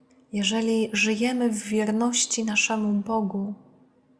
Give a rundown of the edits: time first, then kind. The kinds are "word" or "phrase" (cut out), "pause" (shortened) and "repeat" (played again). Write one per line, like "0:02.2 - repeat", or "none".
none